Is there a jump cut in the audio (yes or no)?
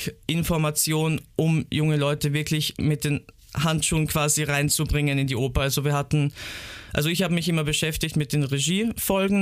no